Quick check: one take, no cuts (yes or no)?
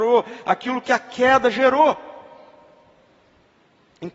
yes